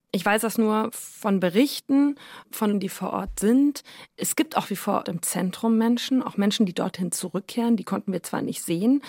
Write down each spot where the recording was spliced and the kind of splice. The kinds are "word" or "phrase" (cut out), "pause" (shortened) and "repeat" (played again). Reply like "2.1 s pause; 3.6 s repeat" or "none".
2.7 s word; 4.6 s word; 5.0 s phrase